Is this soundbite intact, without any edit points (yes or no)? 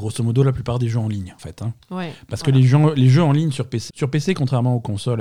no